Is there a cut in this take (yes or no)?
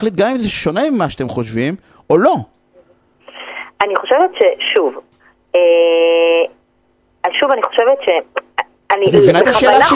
no